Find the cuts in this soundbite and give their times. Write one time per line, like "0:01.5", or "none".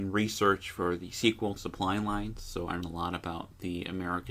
0:01.6
0:02.8